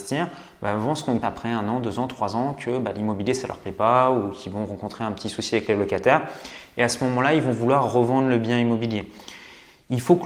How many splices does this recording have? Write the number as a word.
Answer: one